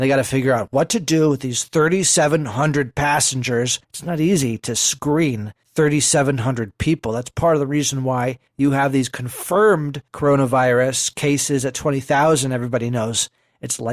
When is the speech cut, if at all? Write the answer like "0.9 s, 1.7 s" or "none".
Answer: 3.8 s, 5.6 s, 8.5 s, 10.1 s